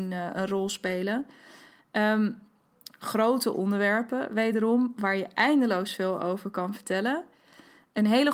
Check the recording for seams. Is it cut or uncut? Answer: uncut